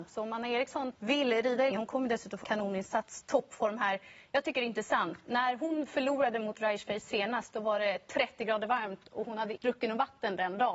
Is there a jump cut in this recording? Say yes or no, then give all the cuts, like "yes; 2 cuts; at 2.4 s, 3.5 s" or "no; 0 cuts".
yes; 4 cuts; at 0.9 s, 1.7 s, 2.4 s, 9.6 s